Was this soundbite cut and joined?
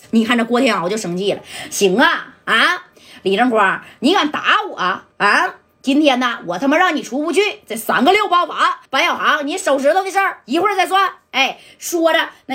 yes; 2 cuts; at 5.1 s, 8.9 s

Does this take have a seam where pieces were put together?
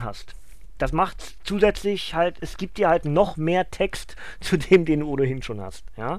yes; 1 cut; at 2.4 s

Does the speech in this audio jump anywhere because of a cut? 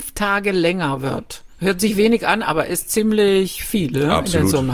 no; 0 cuts

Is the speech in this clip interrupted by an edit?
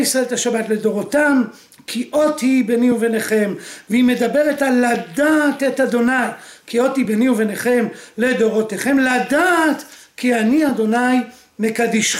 no; 0 cuts

